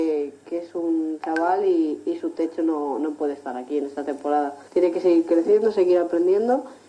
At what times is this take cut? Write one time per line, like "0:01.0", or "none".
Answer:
0:04.7